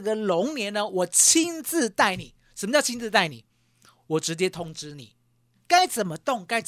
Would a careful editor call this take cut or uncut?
uncut